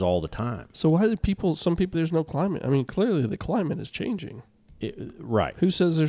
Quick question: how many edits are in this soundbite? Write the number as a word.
one